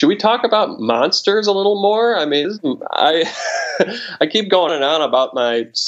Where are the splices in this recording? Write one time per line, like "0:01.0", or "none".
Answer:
0:02.4
0:04.7

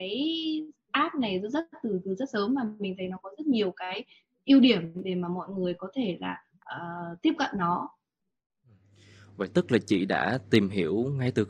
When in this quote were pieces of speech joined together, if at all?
none

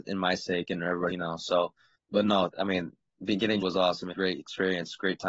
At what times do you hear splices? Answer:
0:01.1
0:01.9
0:02.5
0:03.6
0:04.1

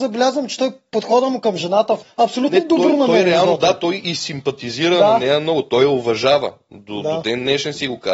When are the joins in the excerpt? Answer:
0:02.0

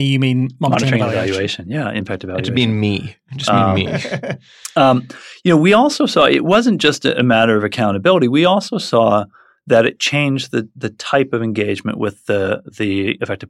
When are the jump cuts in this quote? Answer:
none

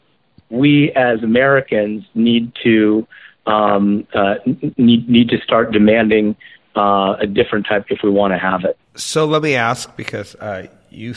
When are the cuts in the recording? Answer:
0:07.8

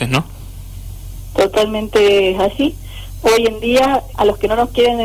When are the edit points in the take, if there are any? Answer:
0:04.1

